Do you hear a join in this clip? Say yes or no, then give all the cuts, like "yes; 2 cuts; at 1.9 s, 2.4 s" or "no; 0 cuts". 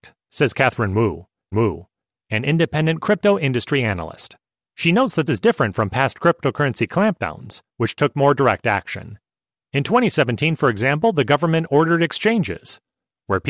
yes; 5 cuts; at 1.5 s, 4.5 s, 5.3 s, 7.7 s, 9.3 s